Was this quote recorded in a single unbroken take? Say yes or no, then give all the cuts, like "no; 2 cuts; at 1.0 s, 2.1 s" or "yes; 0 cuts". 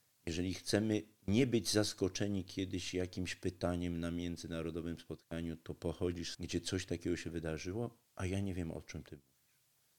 no; 2 cuts; at 6.3 s, 8.1 s